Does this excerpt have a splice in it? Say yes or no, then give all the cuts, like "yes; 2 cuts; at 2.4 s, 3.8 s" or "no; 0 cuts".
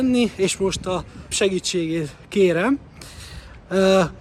yes; 1 cut; at 1.3 s